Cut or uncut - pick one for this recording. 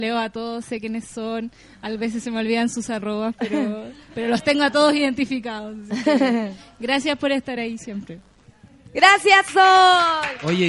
uncut